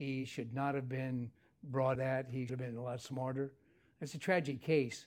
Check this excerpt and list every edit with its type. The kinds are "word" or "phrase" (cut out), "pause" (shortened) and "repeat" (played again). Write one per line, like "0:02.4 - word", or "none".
0:01.9 - word
0:02.5 - word